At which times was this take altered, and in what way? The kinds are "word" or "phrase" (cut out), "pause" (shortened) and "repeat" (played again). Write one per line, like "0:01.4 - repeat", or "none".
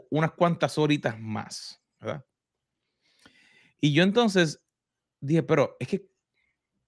none